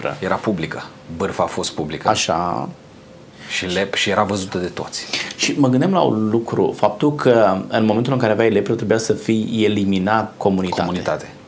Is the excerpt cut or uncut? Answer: cut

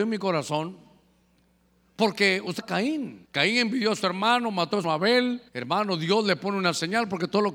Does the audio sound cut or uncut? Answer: cut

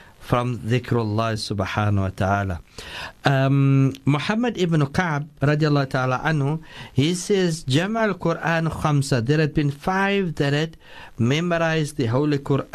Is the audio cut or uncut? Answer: uncut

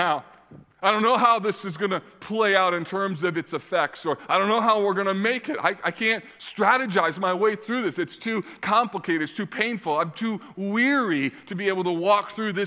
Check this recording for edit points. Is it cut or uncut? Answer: uncut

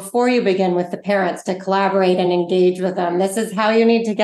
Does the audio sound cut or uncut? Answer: uncut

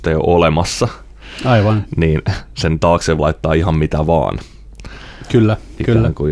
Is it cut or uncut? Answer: cut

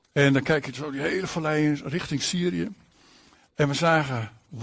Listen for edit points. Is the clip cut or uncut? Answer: uncut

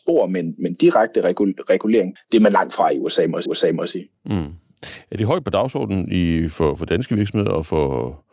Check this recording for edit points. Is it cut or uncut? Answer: cut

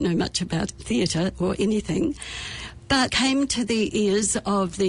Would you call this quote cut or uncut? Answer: cut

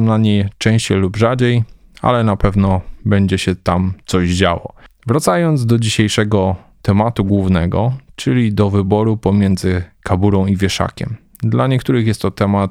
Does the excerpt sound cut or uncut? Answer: uncut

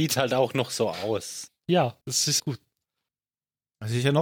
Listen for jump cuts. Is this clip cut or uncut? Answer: cut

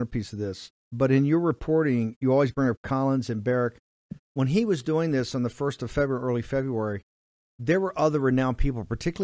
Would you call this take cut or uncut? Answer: uncut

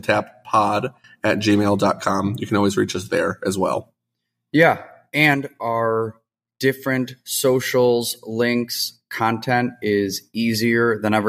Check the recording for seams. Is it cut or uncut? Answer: uncut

